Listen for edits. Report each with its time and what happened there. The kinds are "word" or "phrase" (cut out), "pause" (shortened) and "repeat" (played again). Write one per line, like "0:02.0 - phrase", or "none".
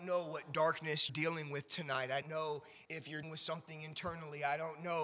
0:01.1 - word
0:02.2 - word
0:02.8 - word
0:03.2 - word